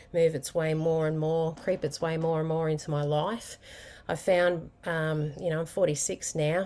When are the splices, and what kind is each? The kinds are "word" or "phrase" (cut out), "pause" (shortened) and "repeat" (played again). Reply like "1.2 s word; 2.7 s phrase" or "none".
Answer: none

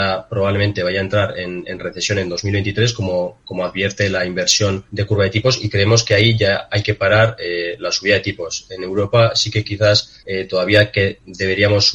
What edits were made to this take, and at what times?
4.9 s pause; 10.2 s pause

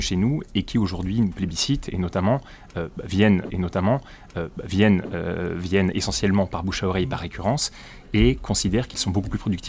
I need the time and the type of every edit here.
3.5 s repeat

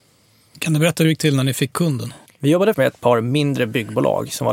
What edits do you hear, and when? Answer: 1.7 s word; 2.3 s pause; 2.7 s word

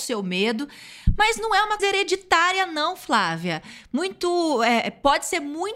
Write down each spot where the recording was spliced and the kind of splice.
1.8 s word

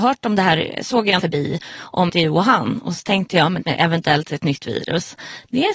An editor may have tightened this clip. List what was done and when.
1.2 s phrase; 2.1 s phrase; 3.6 s phrase

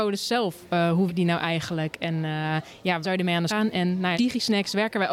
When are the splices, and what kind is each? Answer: 1.1 s word; 3.0 s word; 3.5 s word; 4.1 s word

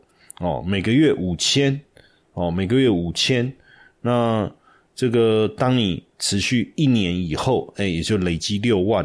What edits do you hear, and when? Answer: none

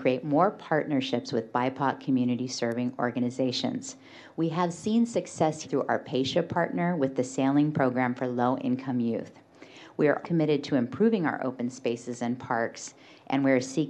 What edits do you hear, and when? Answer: 5.6 s word; 10.2 s word

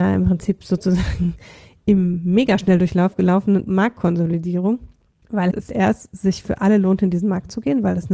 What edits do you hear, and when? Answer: 3.7 s word; 5.7 s word

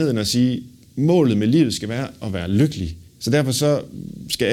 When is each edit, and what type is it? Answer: 3.1 s pause

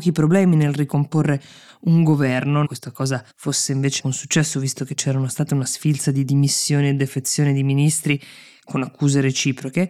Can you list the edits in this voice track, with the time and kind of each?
2.6 s phrase; 3.3 s pause; 4.0 s word

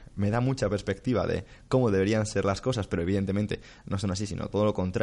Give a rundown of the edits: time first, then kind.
none

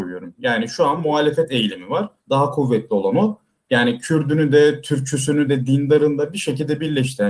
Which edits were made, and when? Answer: 2.2 s pause; 5.5 s phrase

